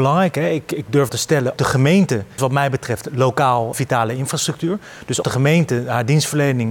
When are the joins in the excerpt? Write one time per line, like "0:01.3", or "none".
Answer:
0:01.1
0:01.6
0:02.4
0:03.7
0:05.2